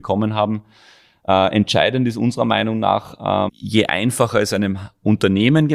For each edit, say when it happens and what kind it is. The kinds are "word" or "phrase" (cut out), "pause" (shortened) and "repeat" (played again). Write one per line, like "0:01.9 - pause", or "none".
0:03.5 - word